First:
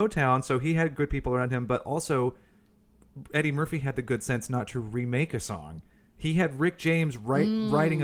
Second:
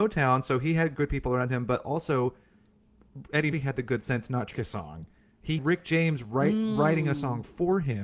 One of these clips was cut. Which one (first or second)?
second